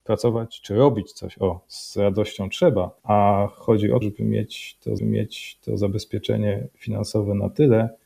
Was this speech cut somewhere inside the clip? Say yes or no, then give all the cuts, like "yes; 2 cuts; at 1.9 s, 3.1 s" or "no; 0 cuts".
yes; 3 cuts; at 3.0 s, 4.0 s, 5.0 s